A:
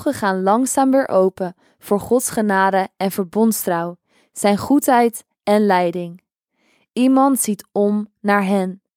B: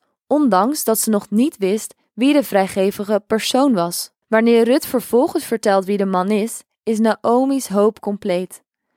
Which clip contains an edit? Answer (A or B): B